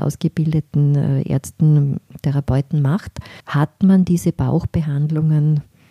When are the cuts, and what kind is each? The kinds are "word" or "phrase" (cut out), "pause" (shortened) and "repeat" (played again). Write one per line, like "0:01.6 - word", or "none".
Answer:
0:03.4 - pause